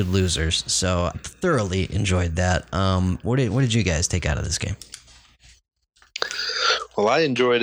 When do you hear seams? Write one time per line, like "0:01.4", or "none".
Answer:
0:01.1